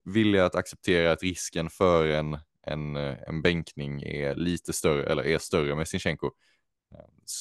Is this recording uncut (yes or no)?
yes